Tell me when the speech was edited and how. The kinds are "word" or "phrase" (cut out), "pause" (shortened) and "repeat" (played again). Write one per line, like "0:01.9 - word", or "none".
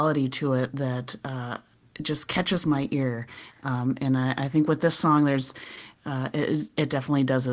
none